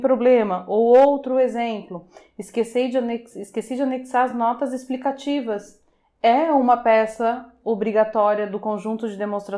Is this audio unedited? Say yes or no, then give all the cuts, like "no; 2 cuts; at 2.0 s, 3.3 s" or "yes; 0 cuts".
yes; 0 cuts